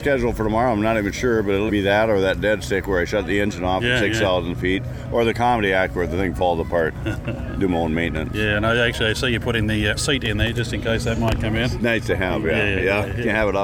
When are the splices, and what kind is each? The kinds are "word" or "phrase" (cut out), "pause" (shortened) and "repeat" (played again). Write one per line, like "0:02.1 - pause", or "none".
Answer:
0:01.7 - word
0:10.0 - word